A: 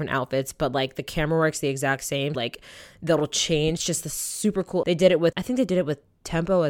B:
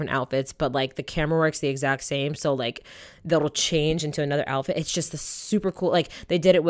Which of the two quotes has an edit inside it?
A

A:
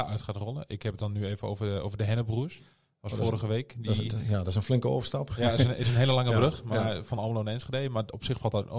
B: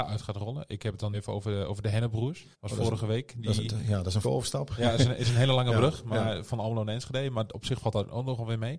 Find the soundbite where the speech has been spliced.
B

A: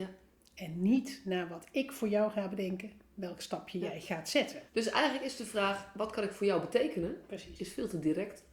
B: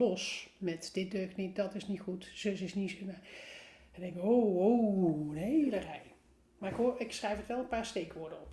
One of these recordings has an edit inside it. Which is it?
A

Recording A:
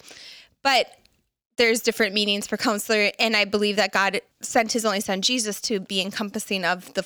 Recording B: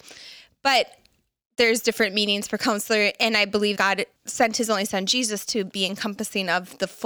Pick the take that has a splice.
B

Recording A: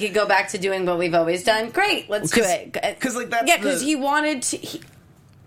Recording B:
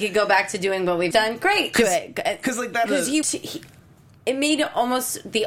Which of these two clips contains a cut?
B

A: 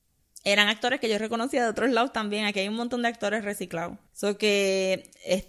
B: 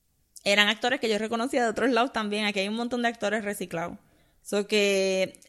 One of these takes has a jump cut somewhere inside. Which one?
A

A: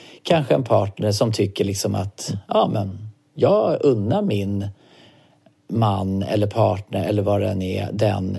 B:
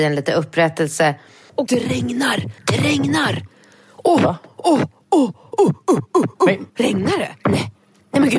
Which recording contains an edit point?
B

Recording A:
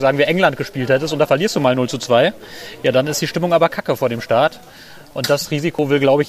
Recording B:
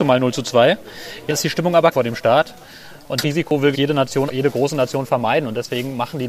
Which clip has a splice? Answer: B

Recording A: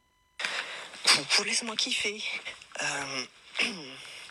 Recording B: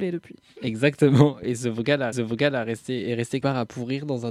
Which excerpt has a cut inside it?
B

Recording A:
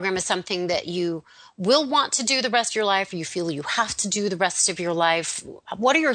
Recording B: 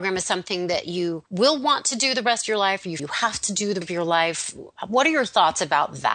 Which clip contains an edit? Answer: B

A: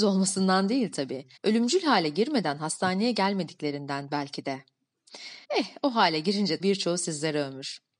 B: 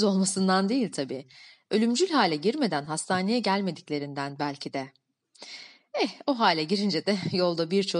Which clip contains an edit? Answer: A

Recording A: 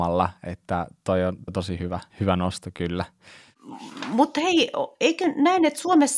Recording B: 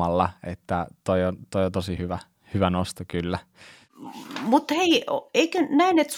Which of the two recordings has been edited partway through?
A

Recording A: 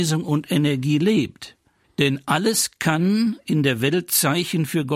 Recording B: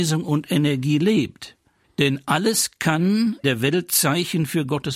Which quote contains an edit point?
B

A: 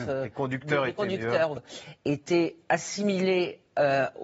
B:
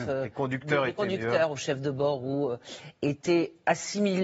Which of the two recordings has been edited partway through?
A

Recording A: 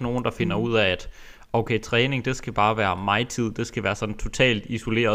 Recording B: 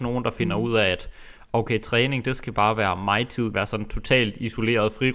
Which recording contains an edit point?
B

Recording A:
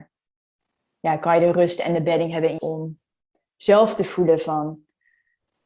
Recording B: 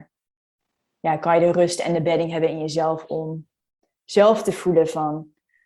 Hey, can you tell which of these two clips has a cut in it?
A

